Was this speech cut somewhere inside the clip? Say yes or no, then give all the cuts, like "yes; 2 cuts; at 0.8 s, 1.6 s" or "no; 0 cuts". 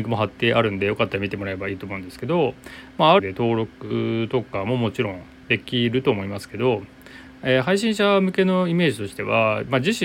yes; 1 cut; at 3.2 s